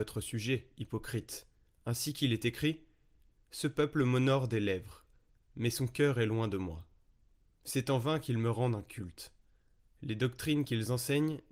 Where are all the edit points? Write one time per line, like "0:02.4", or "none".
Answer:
none

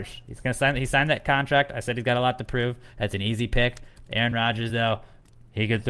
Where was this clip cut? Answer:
none

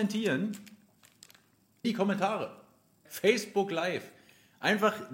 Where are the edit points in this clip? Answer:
0:01.8
0:03.1

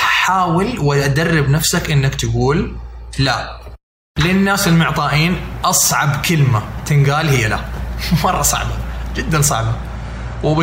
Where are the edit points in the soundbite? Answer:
none

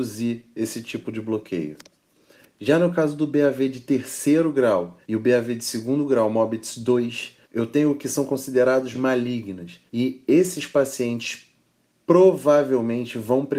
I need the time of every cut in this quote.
0:05.0
0:07.4
0:08.9
0:09.9

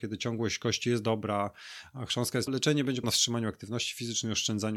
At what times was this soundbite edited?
0:02.5
0:03.0

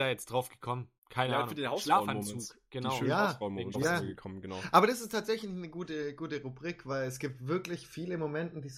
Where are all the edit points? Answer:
0:01.0
0:03.7

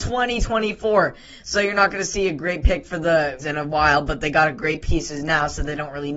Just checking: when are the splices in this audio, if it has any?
0:03.4

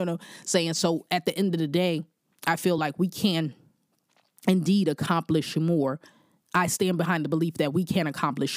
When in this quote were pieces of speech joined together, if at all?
none

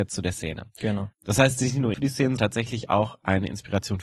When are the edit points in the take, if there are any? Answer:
0:01.1
0:01.9
0:02.4

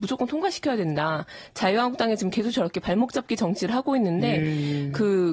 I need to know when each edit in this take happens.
none

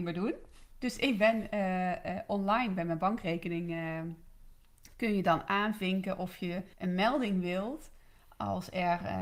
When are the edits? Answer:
0:06.7

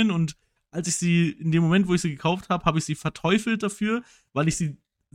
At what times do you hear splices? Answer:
none

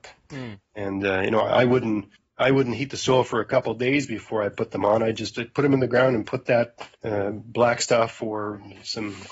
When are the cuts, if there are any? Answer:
0:02.1
0:06.9

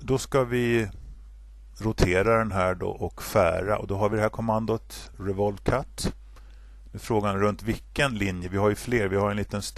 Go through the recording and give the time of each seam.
none

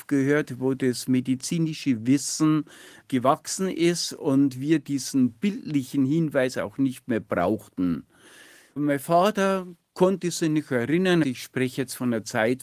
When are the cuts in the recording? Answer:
0:11.2

